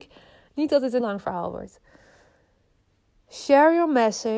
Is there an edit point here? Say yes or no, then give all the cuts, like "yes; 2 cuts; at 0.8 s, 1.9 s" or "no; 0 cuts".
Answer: yes; 1 cut; at 1.0 s